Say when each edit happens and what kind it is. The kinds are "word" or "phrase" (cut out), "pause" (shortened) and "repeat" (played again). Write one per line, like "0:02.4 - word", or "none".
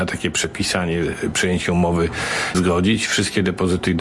0:02.5 - word

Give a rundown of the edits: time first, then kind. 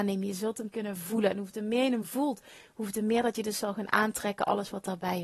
none

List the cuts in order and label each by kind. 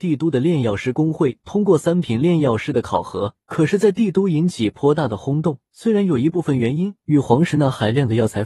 0:03.4 - pause
0:05.7 - pause

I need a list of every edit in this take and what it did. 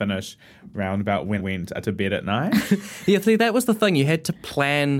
0:01.4 - word

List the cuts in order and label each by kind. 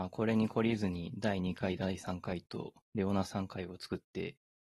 0:02.8 - pause

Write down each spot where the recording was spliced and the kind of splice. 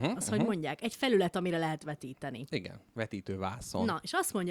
none

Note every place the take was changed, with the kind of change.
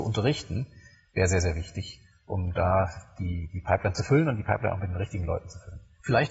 none

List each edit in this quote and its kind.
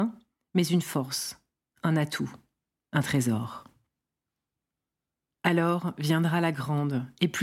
none

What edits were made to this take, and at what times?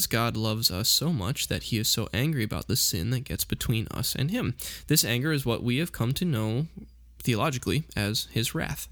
none

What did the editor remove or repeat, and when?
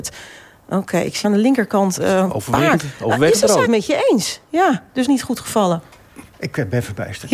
0:01.2 - word
0:03.6 - word
0:05.0 - phrase
0:06.3 - pause

